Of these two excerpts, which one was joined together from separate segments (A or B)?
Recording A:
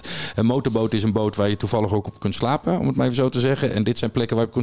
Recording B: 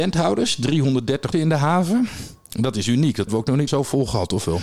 B